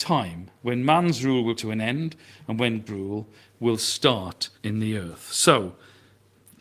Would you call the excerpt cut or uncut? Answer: cut